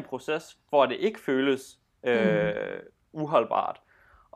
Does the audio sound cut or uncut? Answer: uncut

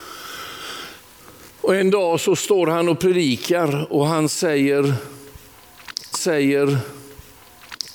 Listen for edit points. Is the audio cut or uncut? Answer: cut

